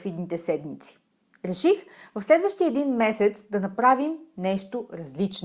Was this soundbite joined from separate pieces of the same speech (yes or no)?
no